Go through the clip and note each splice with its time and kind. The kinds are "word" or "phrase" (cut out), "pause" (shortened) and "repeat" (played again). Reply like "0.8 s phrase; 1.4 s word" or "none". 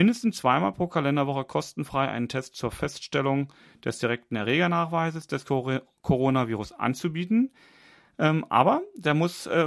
none